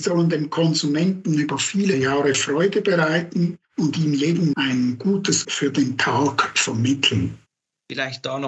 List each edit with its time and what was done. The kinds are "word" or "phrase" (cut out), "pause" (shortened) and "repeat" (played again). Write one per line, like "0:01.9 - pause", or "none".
0:03.6 - pause
0:04.5 - word
0:05.4 - word

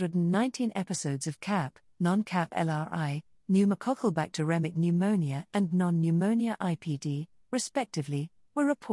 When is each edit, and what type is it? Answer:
none

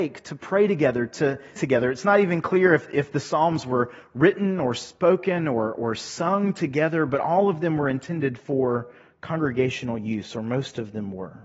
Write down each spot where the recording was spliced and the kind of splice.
0:01.6 - word

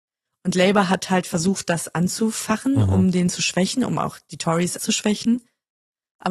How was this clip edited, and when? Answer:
0:04.8 - phrase

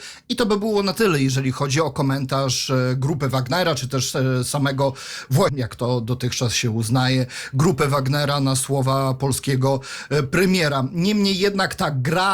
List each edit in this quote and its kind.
0:05.5 - word

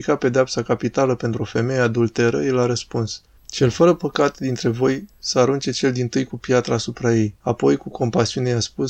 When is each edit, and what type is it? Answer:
0:07.4 - pause

